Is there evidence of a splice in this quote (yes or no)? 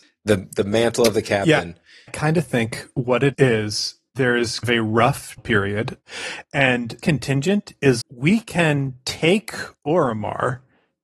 yes